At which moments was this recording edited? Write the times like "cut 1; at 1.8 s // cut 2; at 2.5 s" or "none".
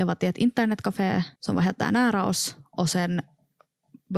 cut 1; at 1.4 s